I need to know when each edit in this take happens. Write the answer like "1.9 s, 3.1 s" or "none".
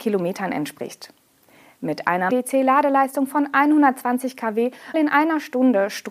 2.3 s, 4.9 s